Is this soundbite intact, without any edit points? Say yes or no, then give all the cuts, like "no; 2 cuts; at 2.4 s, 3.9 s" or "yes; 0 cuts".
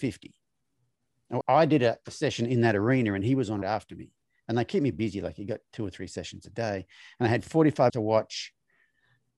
no; 4 cuts; at 1.4 s, 3.6 s, 4.9 s, 7.9 s